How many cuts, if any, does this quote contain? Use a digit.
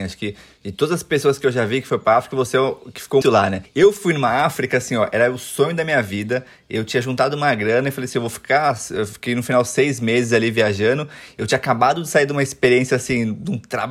1